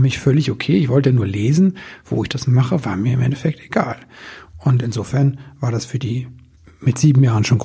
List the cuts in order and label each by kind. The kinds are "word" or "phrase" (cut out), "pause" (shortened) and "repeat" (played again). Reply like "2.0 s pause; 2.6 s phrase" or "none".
none